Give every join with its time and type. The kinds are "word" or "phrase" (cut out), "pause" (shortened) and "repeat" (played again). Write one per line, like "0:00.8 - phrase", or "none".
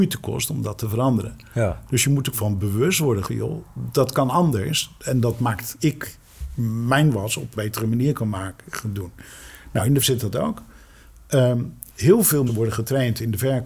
0:02.3 - word
0:03.3 - word
0:05.8 - word
0:07.6 - word
0:10.0 - word
0:12.5 - word

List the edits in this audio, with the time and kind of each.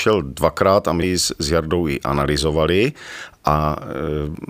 0:01.0 - word

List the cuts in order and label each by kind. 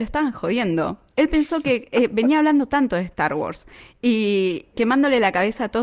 0:04.7 - word

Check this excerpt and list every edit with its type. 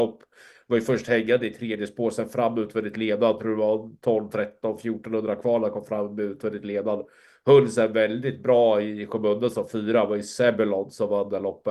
none

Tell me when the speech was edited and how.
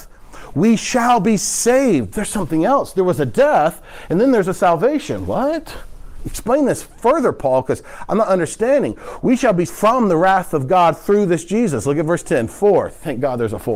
0:09.7 - word

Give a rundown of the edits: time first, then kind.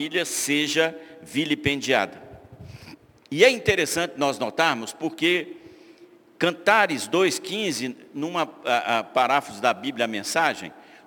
none

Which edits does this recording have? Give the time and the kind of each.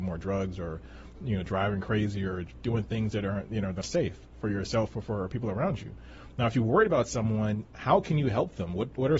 0:03.8 - word

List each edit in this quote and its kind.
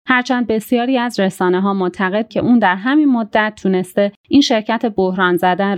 0:02.3 - word

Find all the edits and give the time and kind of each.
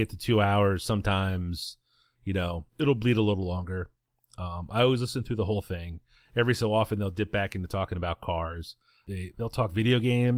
0:02.7 - word

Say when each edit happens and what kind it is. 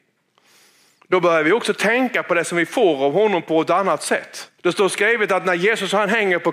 0:04.6 - pause

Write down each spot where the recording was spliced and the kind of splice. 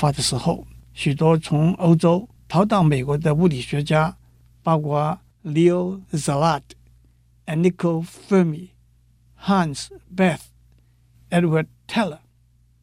none

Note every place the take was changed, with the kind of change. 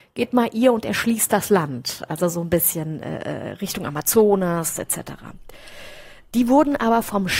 none

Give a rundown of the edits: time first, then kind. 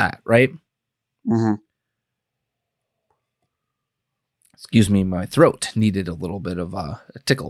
none

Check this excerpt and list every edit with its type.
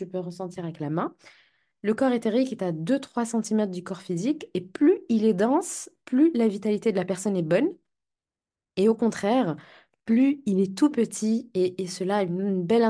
none

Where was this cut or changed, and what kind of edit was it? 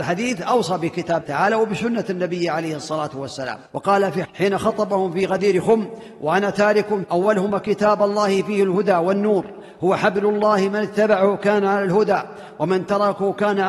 0:01.2 - word
0:03.7 - pause
0:04.2 - phrase
0:07.0 - phrase

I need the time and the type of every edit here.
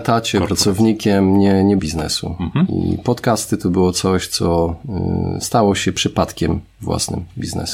0:01.8 - phrase

